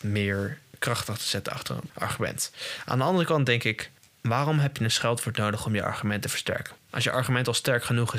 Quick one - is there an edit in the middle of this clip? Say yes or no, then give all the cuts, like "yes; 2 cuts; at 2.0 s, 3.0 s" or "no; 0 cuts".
no; 0 cuts